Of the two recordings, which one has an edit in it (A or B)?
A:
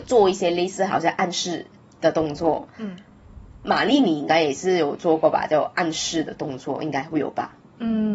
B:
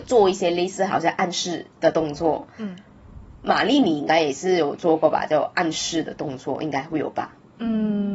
B